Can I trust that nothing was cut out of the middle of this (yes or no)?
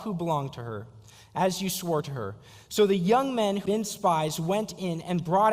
no